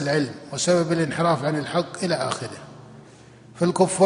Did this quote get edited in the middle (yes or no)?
no